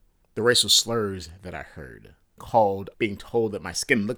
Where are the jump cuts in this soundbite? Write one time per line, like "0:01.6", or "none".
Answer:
0:02.4
0:02.9